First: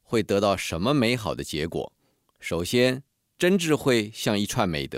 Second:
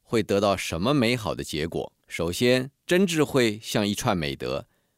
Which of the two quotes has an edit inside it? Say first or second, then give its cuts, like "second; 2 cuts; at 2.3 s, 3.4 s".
second; 2 cuts; at 2.0 s, 2.8 s